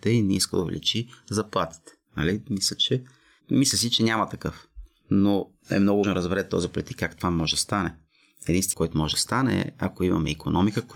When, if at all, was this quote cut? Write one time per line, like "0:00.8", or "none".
0:06.0
0:08.7